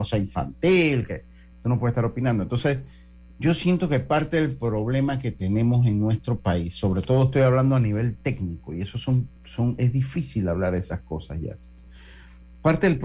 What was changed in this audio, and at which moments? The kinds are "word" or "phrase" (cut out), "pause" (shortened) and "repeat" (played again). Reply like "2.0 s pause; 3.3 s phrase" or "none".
none

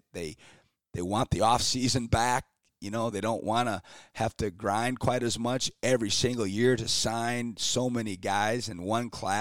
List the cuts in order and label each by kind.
none

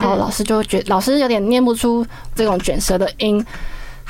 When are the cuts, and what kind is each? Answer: 2.4 s word

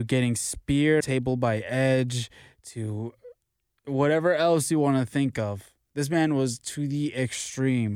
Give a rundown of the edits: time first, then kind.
1.0 s phrase

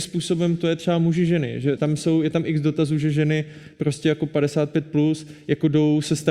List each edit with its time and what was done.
1.8 s word

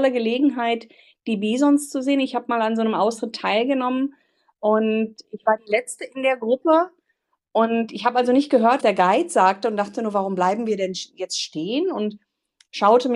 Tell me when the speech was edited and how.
8.8 s word

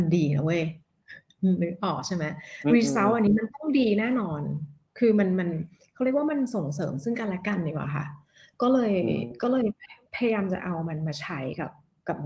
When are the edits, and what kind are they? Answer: none

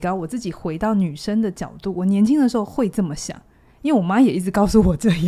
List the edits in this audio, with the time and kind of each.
none

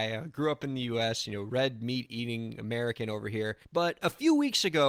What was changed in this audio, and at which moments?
3.6 s pause

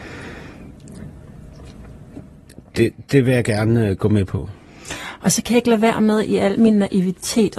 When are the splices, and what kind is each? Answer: 3.1 s pause

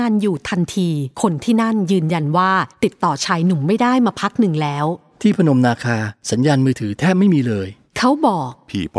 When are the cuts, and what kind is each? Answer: 1.1 s pause; 2.7 s pause; 6.2 s pause

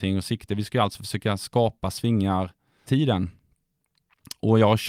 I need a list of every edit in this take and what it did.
1.9 s word; 2.9 s word

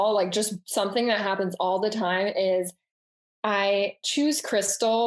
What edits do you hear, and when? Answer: none

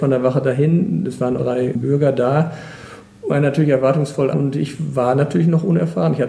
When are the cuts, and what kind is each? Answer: 1.4 s phrase; 3.3 s phrase; 4.3 s word

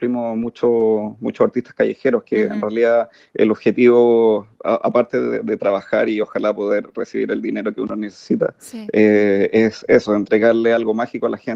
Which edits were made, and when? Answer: none

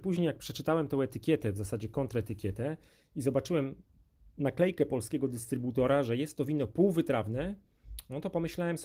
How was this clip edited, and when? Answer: none

